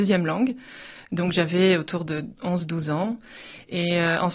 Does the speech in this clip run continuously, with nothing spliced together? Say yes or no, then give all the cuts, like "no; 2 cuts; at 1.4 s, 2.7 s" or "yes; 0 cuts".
yes; 0 cuts